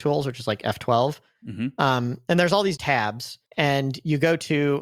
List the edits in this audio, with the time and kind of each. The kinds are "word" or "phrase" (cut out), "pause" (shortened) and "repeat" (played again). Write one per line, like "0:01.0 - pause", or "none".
0:02.8 - word
0:03.5 - pause

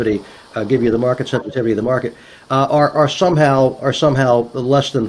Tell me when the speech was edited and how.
none

